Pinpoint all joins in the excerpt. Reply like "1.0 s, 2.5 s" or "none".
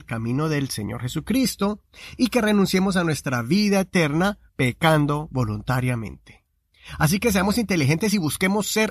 4.5 s